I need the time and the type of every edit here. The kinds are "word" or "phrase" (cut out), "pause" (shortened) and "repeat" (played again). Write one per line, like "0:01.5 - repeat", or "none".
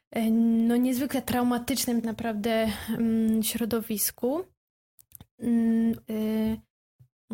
0:02.0 - word
0:06.0 - word